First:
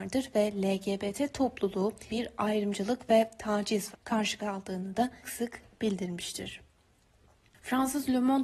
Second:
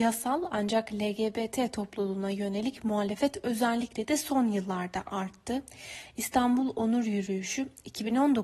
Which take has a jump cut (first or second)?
first